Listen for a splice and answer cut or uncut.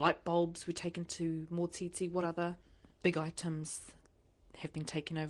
uncut